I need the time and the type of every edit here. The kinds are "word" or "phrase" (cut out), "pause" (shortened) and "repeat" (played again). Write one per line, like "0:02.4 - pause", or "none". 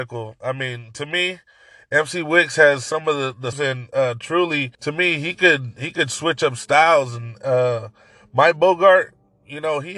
0:03.5 - phrase
0:04.7 - pause